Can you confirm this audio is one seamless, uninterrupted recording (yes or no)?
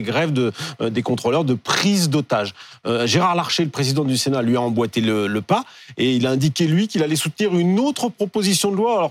yes